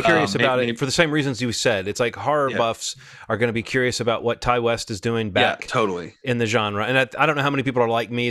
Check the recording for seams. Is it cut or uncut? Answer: uncut